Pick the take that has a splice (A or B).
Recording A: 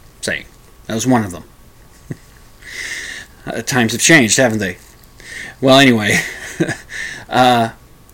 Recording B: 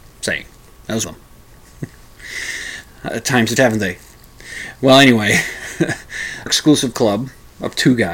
B